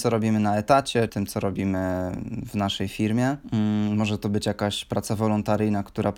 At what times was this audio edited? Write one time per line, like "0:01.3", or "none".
0:01.1

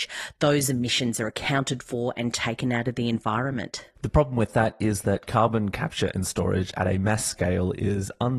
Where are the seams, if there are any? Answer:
none

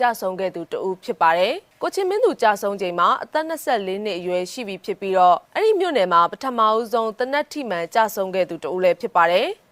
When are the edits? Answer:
0:05.5

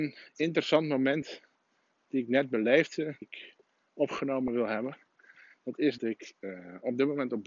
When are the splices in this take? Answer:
0:03.2
0:06.0

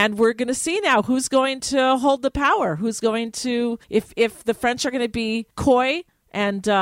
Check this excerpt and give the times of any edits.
0:03.8
0:05.5

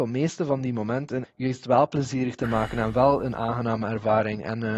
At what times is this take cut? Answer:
0:01.2

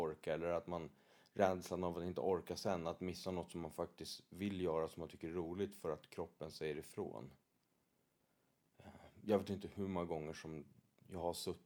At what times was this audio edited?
none

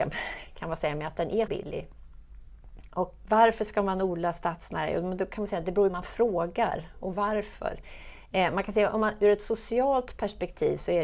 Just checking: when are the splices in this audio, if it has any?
0:01.5
0:03.2
0:05.9

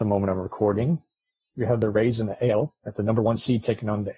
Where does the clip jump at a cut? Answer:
none

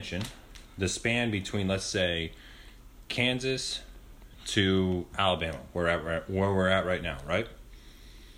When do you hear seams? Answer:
none

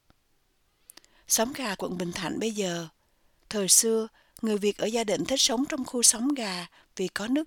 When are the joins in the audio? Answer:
0:01.8

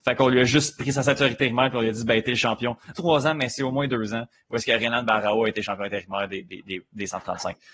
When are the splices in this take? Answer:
0:03.0

